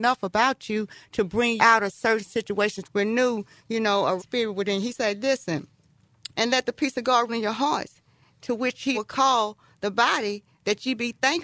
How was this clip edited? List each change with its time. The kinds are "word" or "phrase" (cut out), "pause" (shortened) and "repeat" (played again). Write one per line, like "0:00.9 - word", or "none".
0:01.6 - word
0:02.8 - word
0:04.2 - word
0:06.3 - word
0:07.3 - word
0:08.9 - word